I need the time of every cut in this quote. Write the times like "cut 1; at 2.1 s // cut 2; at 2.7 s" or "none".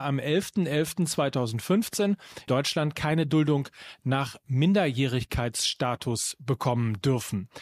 cut 1; at 2.5 s